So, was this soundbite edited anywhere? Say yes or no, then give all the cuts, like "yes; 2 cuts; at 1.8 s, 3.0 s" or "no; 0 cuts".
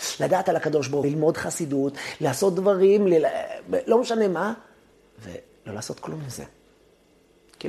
yes; 2 cuts; at 1.0 s, 4.9 s